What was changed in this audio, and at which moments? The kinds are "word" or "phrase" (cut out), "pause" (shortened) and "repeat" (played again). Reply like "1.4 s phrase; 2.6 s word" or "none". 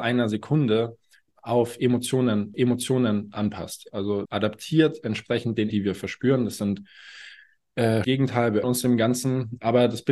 1.3 s word; 2.5 s repeat; 4.3 s phrase; 5.7 s word; 8.0 s phrase; 8.6 s word